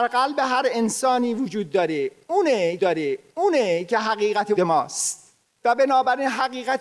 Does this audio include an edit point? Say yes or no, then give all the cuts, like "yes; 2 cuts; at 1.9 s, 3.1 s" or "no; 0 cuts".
yes; 3 cuts; at 2.8 s, 4.6 s, 5.5 s